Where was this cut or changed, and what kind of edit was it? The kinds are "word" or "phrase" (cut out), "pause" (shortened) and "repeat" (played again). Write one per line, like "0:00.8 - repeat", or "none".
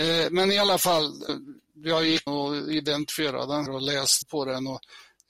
0:01.3 - word
0:02.3 - word
0:03.7 - word
0:04.2 - word